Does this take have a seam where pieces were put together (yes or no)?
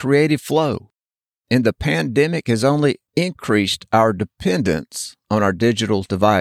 no